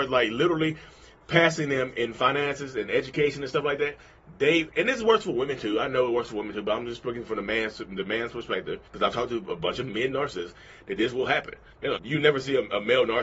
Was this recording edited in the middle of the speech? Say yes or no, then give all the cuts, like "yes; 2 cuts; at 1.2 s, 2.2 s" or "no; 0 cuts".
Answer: yes; 2 cuts; at 8.9 s, 12.0 s